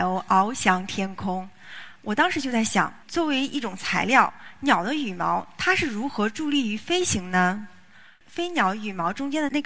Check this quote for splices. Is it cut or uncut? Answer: cut